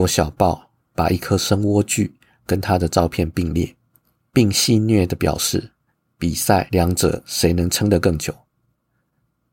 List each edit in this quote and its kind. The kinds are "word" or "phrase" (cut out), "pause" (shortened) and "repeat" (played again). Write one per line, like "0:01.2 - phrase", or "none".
0:03.9 - pause